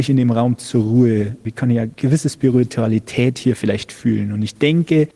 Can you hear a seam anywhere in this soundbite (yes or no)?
no